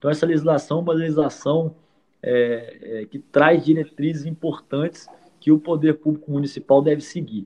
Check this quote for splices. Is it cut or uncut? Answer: uncut